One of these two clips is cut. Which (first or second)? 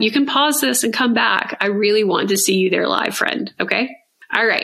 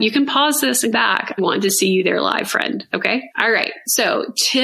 second